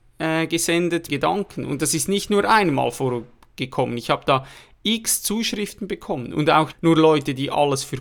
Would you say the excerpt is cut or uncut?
cut